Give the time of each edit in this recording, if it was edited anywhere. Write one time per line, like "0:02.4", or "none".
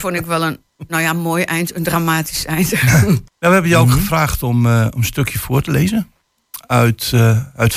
0:03.3